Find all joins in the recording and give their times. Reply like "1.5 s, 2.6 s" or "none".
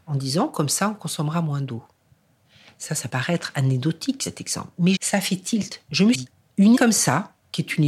3.1 s, 5.0 s, 6.1 s, 6.7 s